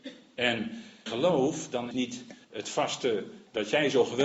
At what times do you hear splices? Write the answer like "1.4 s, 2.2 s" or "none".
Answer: 1.1 s, 1.9 s, 2.4 s